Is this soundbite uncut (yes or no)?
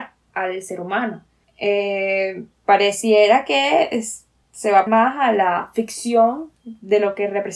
no